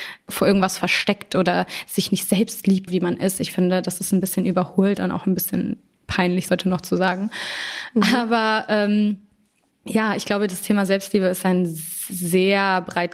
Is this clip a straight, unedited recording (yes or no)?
no